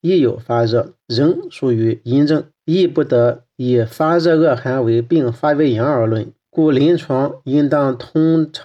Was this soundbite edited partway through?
yes; 3 cuts; at 1.0 s, 2.5 s, 6.4 s

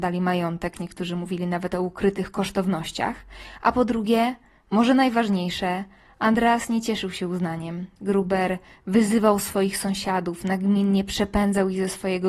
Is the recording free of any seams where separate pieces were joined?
yes; 0 cuts

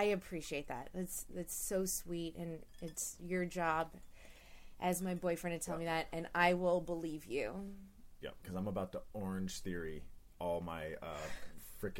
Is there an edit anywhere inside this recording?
no; 0 cuts

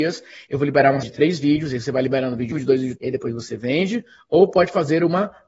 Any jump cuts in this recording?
yes; 3 cuts; at 1.0 s, 2.5 s, 3.0 s

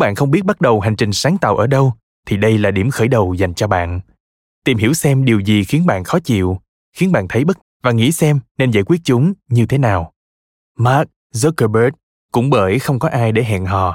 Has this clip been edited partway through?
yes; 1 cut; at 7.6 s

